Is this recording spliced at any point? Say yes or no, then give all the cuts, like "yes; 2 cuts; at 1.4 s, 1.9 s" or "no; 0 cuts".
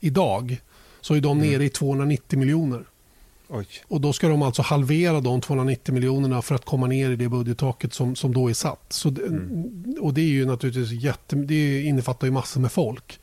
yes; 1 cut; at 3.8 s